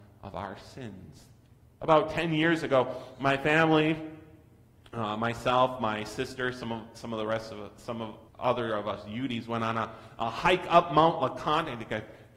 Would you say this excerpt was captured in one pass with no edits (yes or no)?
no